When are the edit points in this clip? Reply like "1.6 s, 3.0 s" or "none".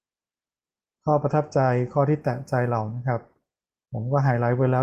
none